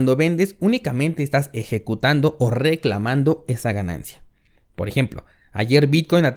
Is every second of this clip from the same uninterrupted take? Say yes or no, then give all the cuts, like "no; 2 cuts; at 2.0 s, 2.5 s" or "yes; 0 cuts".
yes; 0 cuts